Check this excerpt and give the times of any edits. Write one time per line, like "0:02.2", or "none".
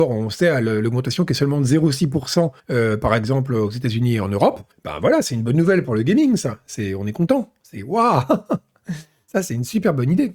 0:02.6
0:04.7